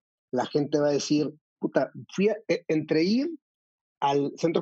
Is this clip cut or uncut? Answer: uncut